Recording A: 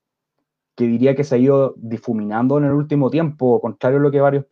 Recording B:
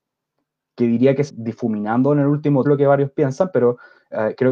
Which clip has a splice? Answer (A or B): B